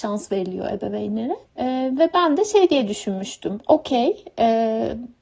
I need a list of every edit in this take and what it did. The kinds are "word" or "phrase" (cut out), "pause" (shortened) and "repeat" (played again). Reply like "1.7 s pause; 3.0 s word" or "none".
1.5 s pause